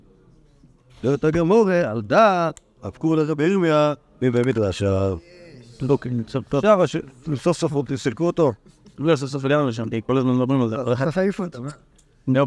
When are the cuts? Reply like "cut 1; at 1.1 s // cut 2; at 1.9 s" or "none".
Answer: none